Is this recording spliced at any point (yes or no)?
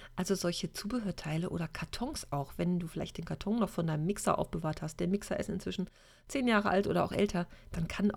no